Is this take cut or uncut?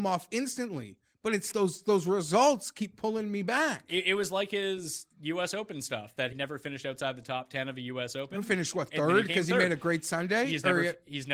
cut